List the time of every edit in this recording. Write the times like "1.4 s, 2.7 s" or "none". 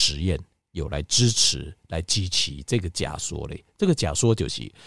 none